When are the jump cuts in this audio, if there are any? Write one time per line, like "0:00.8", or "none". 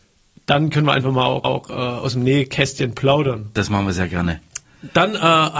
0:01.4